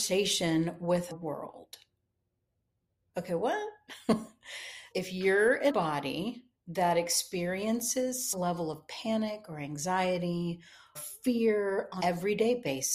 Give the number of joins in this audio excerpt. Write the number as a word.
six